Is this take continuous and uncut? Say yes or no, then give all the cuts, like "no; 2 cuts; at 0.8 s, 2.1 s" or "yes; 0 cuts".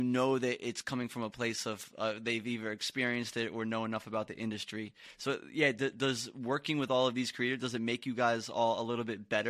yes; 0 cuts